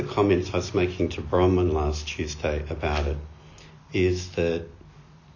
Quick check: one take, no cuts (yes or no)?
yes